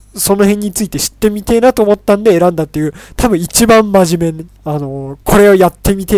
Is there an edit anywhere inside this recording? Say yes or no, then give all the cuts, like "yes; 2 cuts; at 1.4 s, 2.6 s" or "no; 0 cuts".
yes; 2 cuts; at 4.6 s, 5.2 s